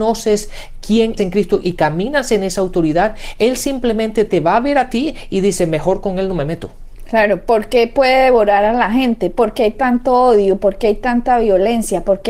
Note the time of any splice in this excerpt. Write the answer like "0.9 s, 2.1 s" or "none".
1.2 s, 1.6 s